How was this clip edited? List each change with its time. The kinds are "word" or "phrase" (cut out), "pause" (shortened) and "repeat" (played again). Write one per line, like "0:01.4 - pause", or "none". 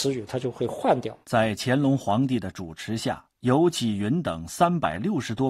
0:01.2 - pause
0:03.3 - pause